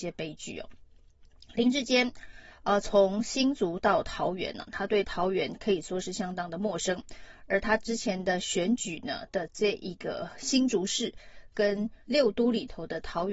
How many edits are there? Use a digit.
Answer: 1